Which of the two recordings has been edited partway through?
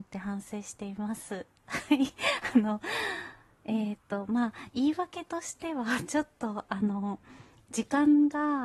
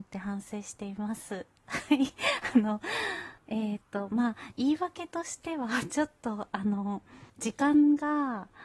second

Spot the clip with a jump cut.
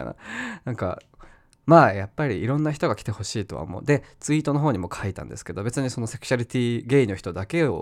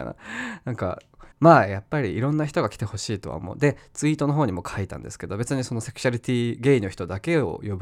second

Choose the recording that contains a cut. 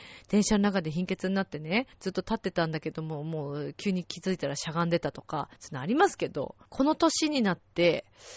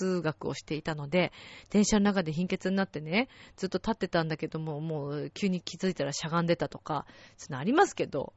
first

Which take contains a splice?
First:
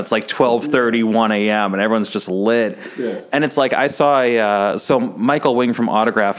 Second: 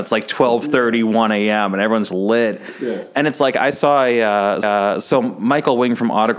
second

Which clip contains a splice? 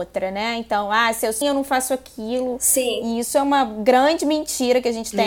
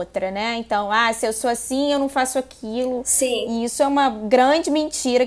first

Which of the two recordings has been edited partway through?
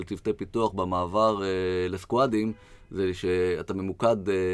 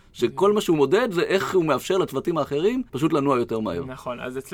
second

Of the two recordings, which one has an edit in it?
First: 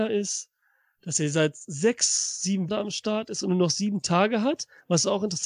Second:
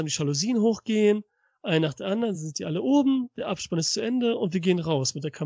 first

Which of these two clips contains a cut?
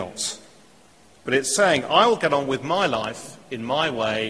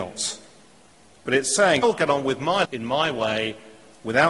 second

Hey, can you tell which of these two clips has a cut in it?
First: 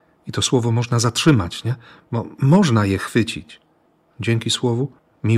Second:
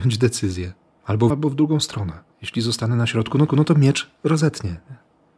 second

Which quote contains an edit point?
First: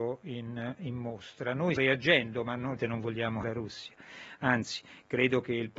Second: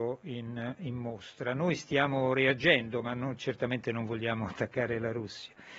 first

